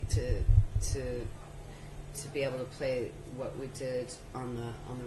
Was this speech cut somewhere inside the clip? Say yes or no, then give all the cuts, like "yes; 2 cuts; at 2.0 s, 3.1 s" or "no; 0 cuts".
no; 0 cuts